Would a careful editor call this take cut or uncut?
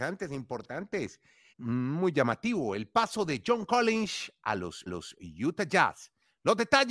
cut